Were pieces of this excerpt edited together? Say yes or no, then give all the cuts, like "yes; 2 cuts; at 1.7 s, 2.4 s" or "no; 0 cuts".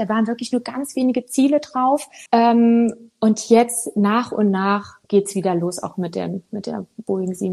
yes; 2 cuts; at 2.3 s, 5.0 s